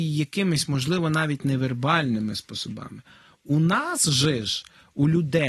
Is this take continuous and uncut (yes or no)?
yes